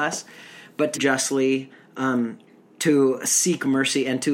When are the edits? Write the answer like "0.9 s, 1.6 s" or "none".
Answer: 0.9 s, 2.6 s